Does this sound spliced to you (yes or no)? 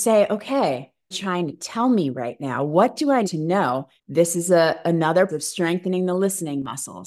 yes